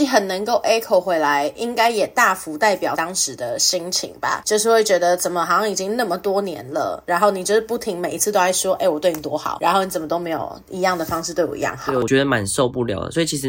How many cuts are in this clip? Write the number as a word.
one